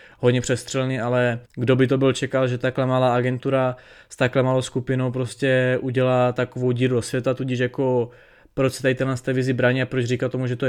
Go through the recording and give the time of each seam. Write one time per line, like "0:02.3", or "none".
0:01.5